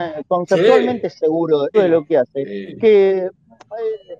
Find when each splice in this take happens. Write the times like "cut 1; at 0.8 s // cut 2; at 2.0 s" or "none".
cut 1; at 1.7 s

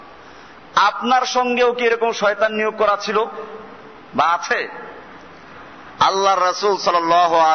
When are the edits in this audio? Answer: none

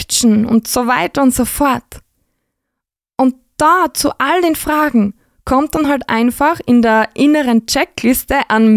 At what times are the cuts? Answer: none

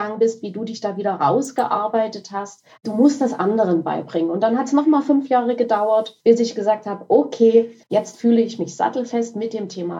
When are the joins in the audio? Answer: cut 1; at 2.7 s // cut 2; at 6.2 s // cut 3; at 7.8 s

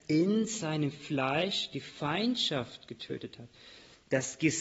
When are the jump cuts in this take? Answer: none

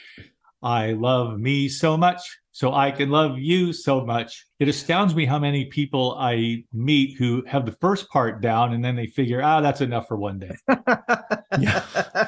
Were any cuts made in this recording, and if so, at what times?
cut 1; at 2.4 s // cut 2; at 4.5 s

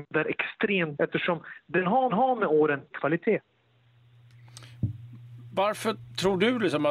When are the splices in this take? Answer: cut 1; at 0.9 s // cut 2; at 2.1 s // cut 3; at 2.9 s

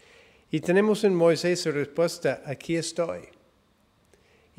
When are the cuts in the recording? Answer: cut 1; at 1.6 s

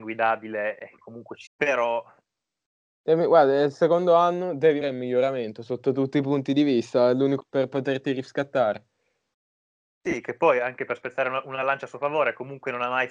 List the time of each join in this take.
cut 1; at 1.0 s // cut 2; at 1.5 s // cut 3; at 4.8 s // cut 4; at 7.4 s

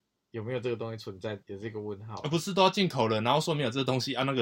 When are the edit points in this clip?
cut 1; at 1.4 s

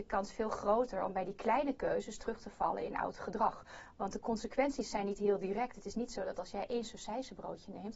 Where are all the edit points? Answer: none

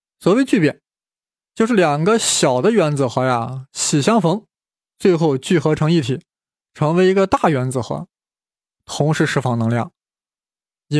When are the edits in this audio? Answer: none

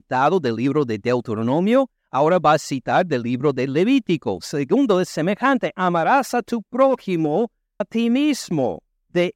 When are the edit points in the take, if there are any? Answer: cut 1; at 7.8 s

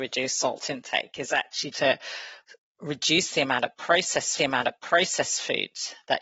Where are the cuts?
cut 1; at 1.7 s // cut 2; at 4.4 s

